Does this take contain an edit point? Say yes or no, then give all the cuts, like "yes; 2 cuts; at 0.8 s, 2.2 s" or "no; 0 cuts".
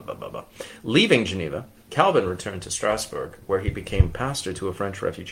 no; 0 cuts